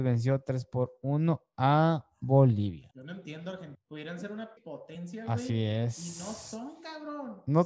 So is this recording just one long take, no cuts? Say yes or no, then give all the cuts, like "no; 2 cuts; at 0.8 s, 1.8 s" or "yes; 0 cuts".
no; 1 cut; at 4.6 s